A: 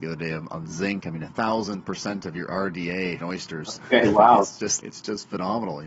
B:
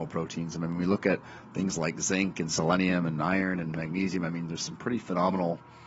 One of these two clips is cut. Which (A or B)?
A